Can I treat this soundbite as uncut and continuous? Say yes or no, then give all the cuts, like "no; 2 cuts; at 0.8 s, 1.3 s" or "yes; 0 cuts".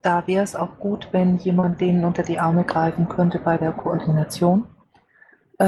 yes; 0 cuts